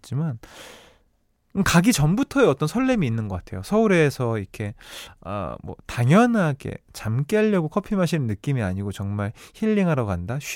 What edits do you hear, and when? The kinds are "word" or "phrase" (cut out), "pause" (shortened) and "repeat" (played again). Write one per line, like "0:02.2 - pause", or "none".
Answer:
none